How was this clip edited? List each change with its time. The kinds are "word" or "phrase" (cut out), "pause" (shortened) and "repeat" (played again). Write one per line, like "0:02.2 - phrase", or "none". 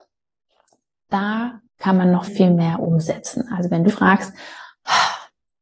0:01.7 - pause
0:02.3 - word
0:03.9 - word